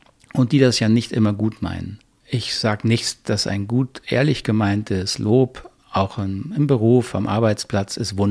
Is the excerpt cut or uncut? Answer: uncut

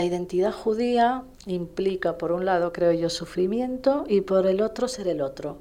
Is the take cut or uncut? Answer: cut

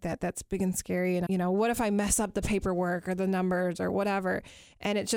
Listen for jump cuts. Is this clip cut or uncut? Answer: cut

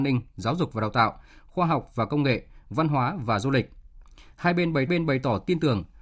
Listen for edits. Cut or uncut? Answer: cut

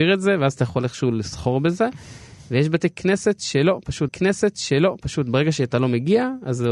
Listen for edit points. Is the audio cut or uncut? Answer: cut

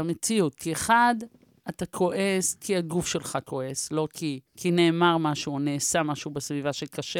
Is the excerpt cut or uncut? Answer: cut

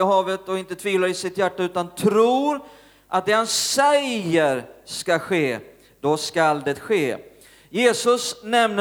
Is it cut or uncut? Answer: uncut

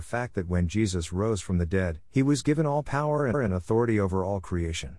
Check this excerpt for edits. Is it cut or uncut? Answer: cut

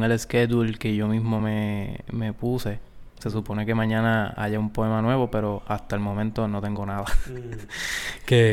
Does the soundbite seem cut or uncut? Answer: uncut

